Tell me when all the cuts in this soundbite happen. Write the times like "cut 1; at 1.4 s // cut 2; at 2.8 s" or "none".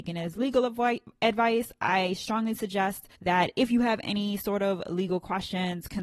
cut 1; at 3.2 s